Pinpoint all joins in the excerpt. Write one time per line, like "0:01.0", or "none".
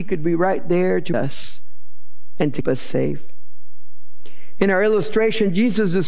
0:01.1
0:02.6